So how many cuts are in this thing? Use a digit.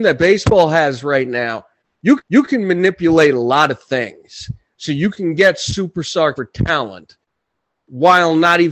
2